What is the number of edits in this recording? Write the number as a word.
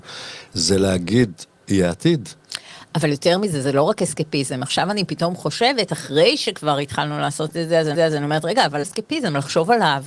two